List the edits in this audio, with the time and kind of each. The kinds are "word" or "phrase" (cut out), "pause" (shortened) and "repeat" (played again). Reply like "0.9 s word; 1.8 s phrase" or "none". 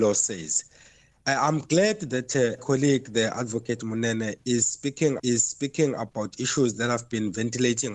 2.6 s word; 5.2 s repeat